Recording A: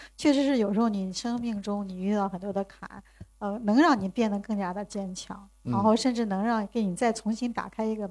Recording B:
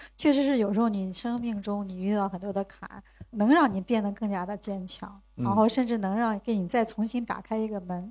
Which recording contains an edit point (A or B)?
B